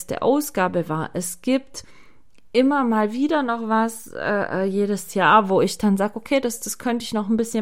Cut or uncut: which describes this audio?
uncut